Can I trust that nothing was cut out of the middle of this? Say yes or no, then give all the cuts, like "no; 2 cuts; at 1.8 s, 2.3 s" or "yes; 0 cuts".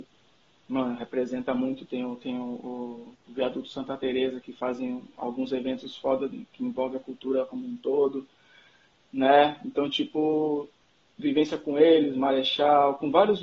yes; 0 cuts